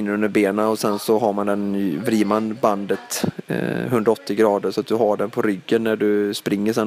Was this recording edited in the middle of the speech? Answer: no; 0 cuts

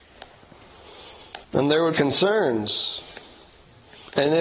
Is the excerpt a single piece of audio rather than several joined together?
no; 2 cuts; at 1.4 s, 1.9 s

